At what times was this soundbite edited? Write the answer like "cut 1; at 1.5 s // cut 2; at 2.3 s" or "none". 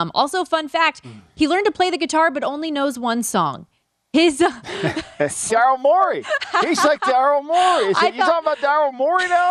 cut 1; at 5.5 s